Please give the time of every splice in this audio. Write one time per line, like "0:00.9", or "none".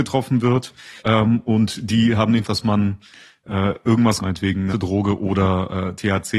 0:01.0
0:02.4
0:04.2
0:04.7